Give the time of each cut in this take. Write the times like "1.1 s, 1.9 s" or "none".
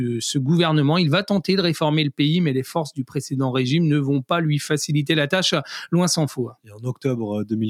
none